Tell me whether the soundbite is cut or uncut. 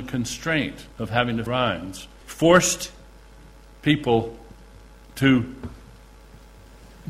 cut